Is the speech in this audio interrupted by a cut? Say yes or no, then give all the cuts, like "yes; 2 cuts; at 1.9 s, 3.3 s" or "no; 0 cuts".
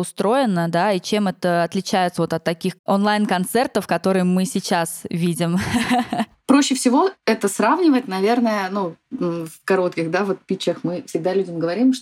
yes; 1 cut; at 2.8 s